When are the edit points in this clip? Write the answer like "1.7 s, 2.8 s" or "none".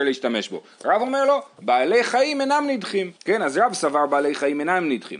3.2 s